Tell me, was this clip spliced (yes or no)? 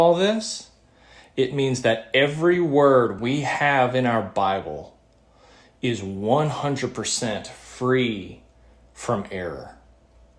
no